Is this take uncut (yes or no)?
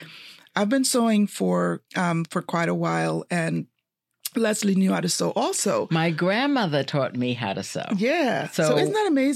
no